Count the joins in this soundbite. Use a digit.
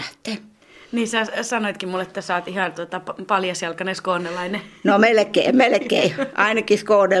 1